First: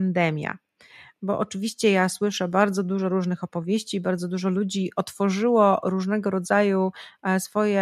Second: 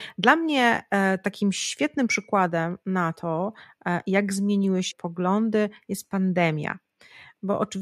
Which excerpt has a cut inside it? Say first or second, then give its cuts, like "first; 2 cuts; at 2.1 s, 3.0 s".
second; 1 cut; at 4.9 s